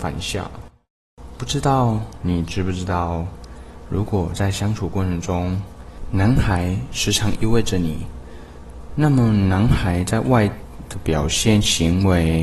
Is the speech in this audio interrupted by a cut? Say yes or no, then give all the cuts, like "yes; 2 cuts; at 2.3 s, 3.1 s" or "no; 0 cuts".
yes; 1 cut; at 1.4 s